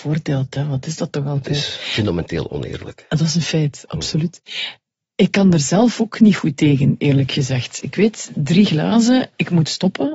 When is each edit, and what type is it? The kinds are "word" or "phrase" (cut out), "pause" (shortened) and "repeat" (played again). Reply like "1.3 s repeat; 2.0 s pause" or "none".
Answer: none